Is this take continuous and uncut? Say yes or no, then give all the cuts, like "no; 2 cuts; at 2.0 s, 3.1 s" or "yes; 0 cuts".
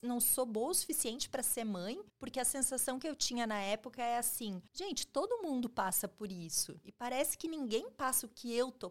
no; 2 cuts; at 2.1 s, 4.7 s